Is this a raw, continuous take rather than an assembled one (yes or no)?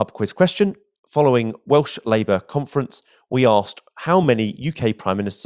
yes